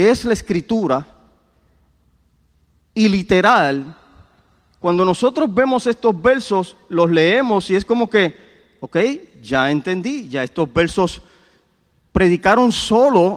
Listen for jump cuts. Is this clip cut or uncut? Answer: uncut